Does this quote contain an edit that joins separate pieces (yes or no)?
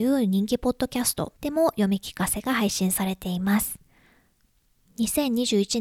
yes